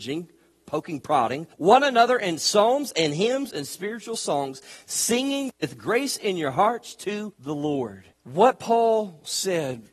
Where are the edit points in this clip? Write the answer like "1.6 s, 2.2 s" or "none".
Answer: 1.5 s, 7.3 s, 8.1 s